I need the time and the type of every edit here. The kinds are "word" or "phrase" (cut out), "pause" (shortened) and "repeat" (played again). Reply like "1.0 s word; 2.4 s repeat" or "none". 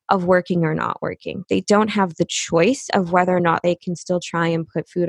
none